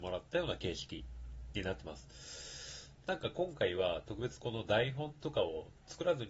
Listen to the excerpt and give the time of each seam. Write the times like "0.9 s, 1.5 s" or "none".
3.0 s